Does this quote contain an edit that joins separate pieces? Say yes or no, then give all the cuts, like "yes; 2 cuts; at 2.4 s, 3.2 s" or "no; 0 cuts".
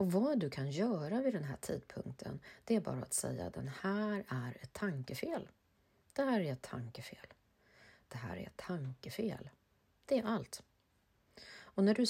no; 0 cuts